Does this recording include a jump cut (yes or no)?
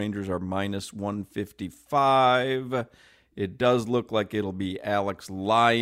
no